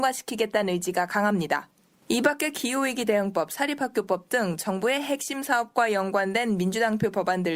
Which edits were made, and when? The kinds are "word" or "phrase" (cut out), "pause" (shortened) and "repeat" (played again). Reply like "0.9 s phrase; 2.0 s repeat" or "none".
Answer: none